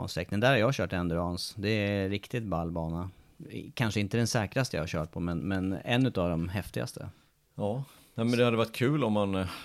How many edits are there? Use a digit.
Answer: 0